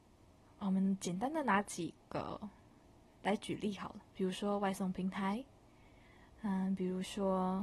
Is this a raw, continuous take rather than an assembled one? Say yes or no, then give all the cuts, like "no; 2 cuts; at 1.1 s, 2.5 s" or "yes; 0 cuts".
yes; 0 cuts